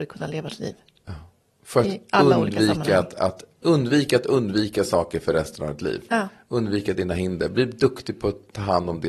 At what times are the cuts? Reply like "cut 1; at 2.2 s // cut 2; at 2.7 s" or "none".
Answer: cut 1; at 3.6 s